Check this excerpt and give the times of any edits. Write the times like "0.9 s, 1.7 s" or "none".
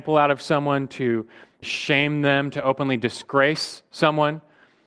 1.6 s